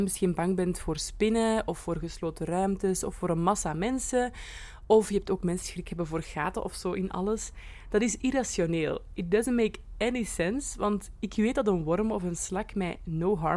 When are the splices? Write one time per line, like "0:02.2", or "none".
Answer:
0:05.6